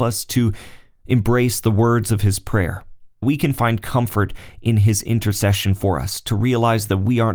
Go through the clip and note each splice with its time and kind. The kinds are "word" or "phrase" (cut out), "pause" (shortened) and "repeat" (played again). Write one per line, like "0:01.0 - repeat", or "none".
0:03.2 - word

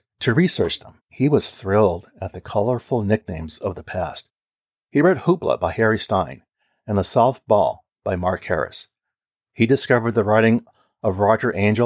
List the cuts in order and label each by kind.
0:01.0 - pause

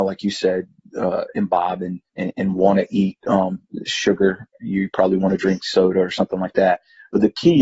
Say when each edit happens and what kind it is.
0:02.1 - pause

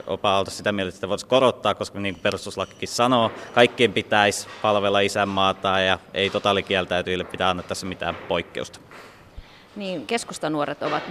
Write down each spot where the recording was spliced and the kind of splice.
none

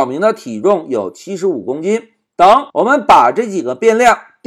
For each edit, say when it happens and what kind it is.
0:02.7 - pause

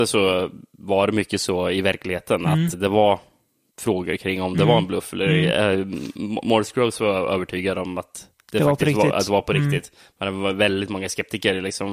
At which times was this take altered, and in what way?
0:02.7 - word

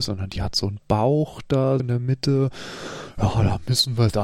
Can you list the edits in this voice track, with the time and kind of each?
0:01.8 - word

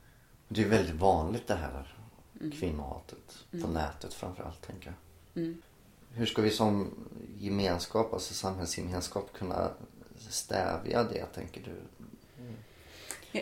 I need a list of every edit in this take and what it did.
none

